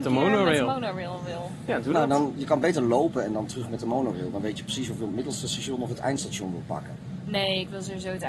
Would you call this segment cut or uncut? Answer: uncut